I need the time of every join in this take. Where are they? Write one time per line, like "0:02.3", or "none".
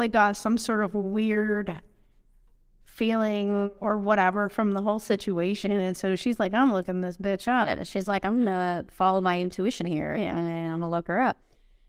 none